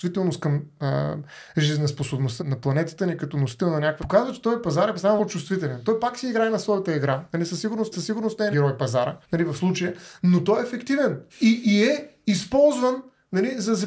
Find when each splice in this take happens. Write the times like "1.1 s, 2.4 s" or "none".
2.4 s, 4.0 s, 5.2 s, 7.9 s, 8.5 s, 9.2 s, 11.3 s